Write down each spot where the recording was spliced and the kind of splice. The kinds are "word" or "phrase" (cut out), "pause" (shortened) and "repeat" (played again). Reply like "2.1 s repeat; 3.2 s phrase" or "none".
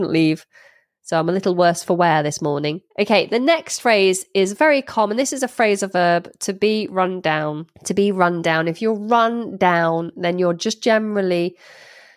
2.9 s pause; 7.7 s pause